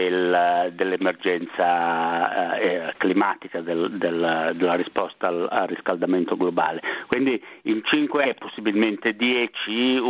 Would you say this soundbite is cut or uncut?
cut